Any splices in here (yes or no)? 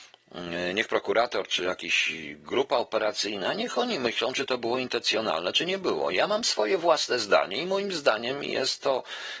no